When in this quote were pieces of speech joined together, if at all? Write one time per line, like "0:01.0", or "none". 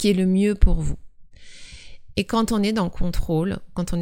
none